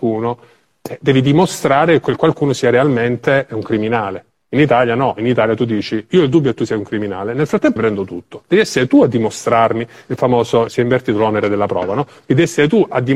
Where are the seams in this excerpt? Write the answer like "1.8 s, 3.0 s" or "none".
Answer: 7.8 s, 10.7 s